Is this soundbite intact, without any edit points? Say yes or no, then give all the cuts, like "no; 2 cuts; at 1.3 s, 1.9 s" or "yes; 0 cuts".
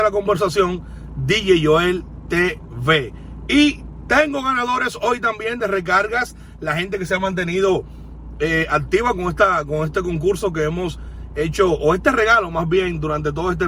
yes; 0 cuts